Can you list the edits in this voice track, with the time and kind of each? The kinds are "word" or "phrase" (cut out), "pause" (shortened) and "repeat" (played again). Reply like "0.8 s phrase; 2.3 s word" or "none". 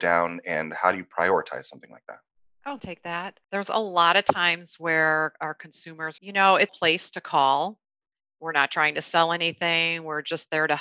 2.8 s phrase; 3.4 s pause; 6.2 s phrase; 6.7 s phrase